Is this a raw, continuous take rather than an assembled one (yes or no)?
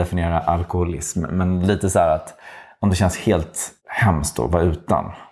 no